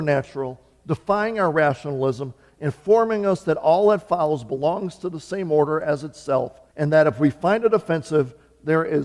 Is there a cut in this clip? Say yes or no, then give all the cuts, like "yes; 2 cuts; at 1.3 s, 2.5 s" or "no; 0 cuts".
yes; 1 cut; at 6.7 s